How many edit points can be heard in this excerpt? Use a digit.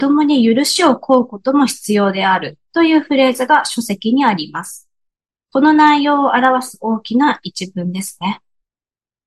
1